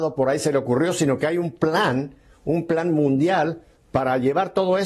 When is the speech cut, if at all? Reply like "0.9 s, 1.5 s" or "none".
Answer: none